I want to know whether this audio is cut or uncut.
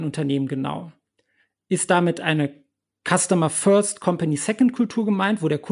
uncut